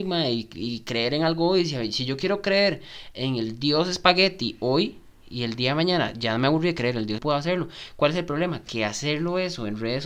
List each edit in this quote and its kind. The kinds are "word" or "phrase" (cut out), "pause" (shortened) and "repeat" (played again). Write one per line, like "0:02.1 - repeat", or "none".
0:07.2 - phrase